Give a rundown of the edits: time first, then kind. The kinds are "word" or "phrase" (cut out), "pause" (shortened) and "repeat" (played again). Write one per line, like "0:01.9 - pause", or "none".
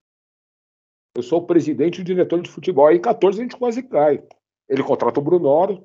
none